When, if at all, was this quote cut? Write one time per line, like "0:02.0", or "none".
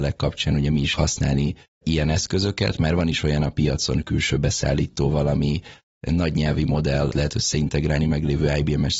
0:00.9